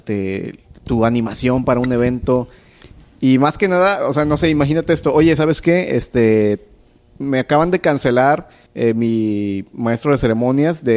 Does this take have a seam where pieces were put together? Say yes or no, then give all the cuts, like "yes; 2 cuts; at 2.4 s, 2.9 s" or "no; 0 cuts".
yes; 1 cut; at 8.7 s